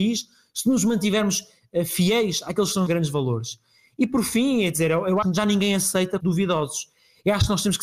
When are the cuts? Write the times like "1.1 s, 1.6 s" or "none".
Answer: 2.9 s, 5.2 s, 6.2 s